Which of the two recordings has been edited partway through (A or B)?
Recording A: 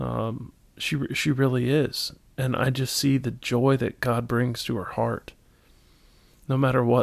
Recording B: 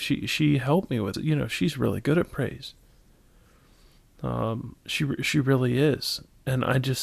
B